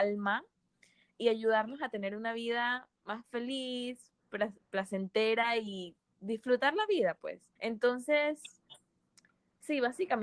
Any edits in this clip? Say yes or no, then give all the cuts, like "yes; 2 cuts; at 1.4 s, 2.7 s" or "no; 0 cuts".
yes; 2 cuts; at 2.9 s, 7.6 s